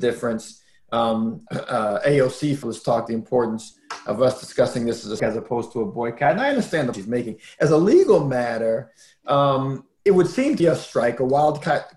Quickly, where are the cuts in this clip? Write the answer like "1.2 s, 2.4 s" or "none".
1.5 s, 2.6 s, 3.1 s, 5.2 s, 6.9 s, 10.1 s, 10.6 s